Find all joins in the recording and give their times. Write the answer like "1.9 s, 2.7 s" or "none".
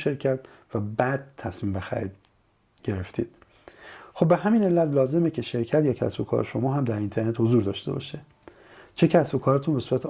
none